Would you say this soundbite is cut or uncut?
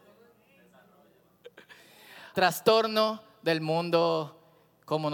cut